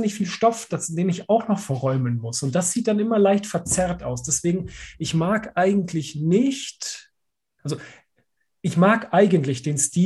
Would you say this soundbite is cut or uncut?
uncut